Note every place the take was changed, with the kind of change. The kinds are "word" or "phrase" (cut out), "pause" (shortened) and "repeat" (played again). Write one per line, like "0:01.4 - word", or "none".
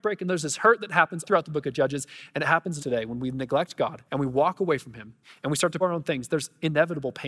0:01.2 - word
0:02.8 - phrase
0:04.1 - pause
0:05.2 - pause
0:05.8 - word